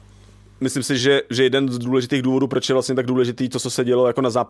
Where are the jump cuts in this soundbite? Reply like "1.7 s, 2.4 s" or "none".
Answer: none